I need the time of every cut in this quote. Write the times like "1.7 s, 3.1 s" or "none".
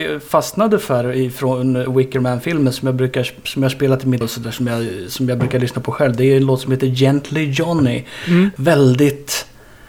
4.2 s